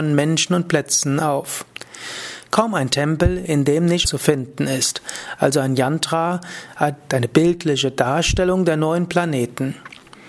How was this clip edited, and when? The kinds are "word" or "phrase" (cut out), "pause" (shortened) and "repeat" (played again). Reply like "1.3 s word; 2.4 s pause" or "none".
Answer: 4.0 s phrase